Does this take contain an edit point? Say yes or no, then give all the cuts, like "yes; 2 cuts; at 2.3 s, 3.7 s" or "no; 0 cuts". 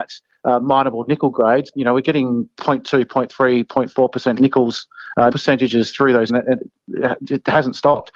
yes; 3 cuts; at 1.7 s, 5.3 s, 6.3 s